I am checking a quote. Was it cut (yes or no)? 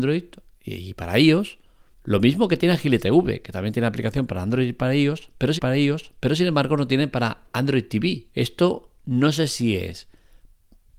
yes